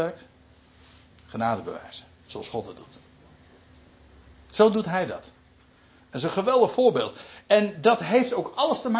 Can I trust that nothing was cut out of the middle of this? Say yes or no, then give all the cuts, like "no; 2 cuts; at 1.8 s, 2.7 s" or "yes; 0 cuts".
yes; 0 cuts